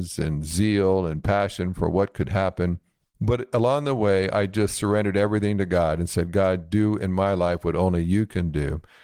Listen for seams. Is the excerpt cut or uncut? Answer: uncut